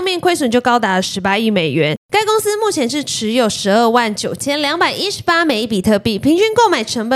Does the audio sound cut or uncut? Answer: uncut